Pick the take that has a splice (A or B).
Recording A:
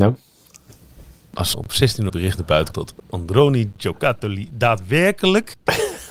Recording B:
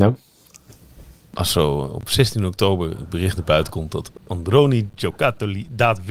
A